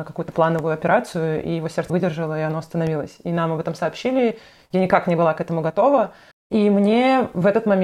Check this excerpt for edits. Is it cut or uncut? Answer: cut